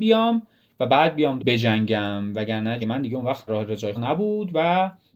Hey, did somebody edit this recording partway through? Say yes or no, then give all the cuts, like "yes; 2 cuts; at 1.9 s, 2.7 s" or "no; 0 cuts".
yes; 4 cuts; at 1.4 s, 2.8 s, 3.5 s, 4.0 s